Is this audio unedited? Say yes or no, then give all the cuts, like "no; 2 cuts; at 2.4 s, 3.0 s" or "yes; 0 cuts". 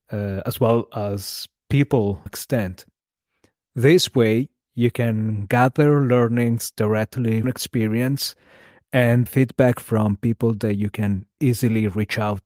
no; 3 cuts; at 2.3 s, 7.4 s, 9.3 s